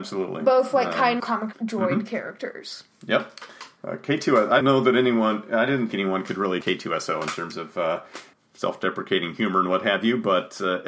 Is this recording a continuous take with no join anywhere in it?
no; 6 cuts; at 1.2 s, 1.5 s, 4.6 s, 5.9 s, 6.6 s, 8.3 s

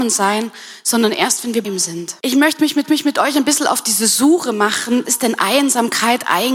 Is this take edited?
yes; 4 cuts; at 1.6 s, 2.2 s, 2.8 s, 5.0 s

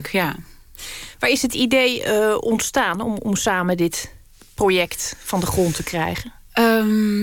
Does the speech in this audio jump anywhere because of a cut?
no; 0 cuts

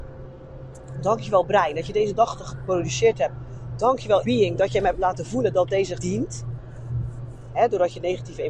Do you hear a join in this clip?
yes; 2 cuts; at 4.2 s, 6.0 s

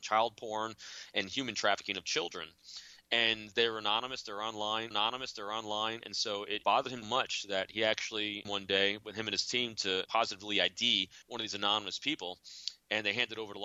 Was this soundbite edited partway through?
yes; 6 cuts; at 4.9 s, 6.6 s, 7.0 s, 8.4 s, 10.1 s, 11.2 s

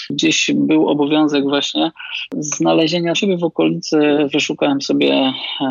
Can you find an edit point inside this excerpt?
yes; 1 cut; at 3.1 s

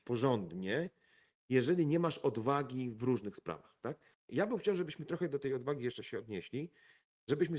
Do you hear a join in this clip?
yes; 1 cut; at 4.2 s

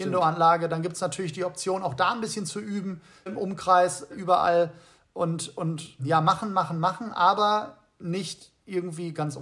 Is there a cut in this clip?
yes; 3 cuts; at 3.3 s, 4.1 s, 6.0 s

